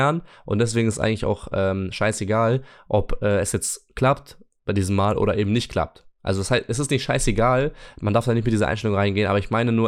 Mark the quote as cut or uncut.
uncut